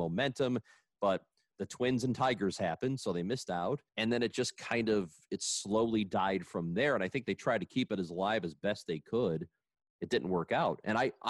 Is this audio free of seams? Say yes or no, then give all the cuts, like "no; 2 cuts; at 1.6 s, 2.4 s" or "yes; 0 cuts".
no; 1 cut; at 3.9 s